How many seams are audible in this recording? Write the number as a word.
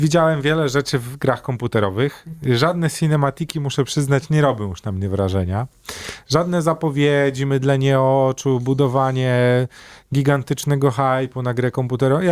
zero